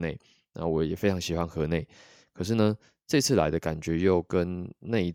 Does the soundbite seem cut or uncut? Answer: uncut